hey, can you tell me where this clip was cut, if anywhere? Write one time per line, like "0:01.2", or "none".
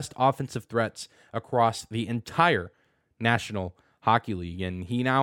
none